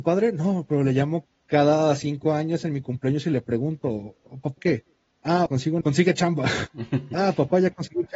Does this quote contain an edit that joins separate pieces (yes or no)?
yes